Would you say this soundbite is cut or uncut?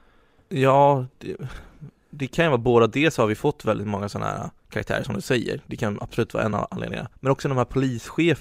cut